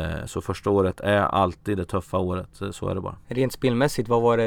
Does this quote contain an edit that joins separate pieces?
yes; 1 cut; at 3.2 s

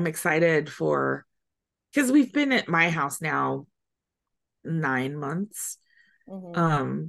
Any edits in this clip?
no; 0 cuts

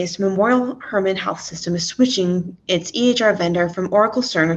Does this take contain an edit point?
no; 0 cuts

